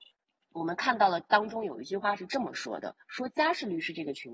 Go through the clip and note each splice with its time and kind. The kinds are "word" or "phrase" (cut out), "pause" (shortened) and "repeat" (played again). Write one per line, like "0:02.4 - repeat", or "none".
0:03.0 - pause